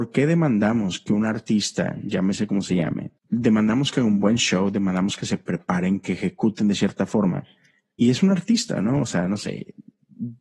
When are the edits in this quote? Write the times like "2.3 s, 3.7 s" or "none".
3.2 s